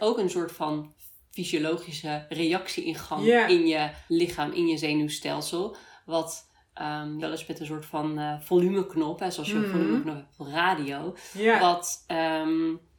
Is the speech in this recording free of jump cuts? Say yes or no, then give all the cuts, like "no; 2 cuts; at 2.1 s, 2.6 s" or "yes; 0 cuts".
no; 2 cuts; at 4.1 s, 7.2 s